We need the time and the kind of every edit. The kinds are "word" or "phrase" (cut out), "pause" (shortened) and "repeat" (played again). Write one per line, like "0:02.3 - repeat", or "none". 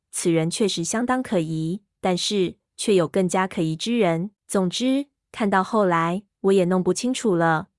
0:04.4 - pause